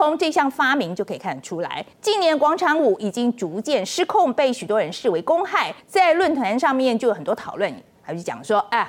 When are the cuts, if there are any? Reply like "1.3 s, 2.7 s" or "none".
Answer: 1.9 s, 5.8 s